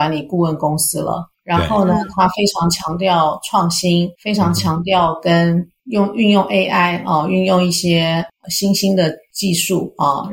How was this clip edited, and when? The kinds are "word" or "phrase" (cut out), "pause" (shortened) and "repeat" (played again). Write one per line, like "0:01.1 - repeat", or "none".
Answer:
0:04.1 - pause